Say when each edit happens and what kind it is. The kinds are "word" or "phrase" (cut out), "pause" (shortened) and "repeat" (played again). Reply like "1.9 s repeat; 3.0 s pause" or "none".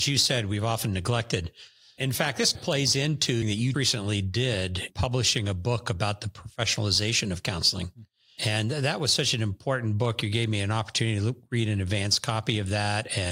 2.0 s word; 2.5 s word; 3.4 s word; 3.7 s word; 4.9 s word; 8.4 s word